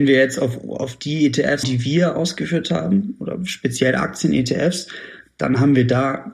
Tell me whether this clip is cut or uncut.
cut